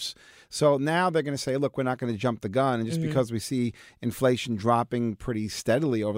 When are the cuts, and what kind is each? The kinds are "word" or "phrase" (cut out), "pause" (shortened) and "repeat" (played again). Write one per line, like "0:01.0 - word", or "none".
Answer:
none